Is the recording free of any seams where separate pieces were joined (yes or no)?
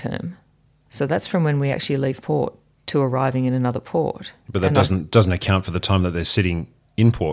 yes